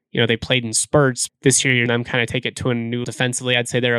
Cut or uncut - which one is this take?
cut